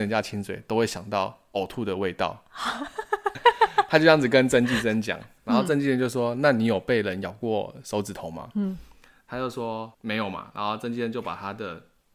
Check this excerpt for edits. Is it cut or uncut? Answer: cut